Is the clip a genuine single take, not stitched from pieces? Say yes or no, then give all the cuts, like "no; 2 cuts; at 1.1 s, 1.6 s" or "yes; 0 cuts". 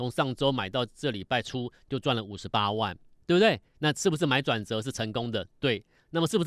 no; 2 cuts; at 3.2 s, 3.7 s